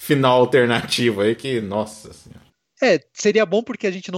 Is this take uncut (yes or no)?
yes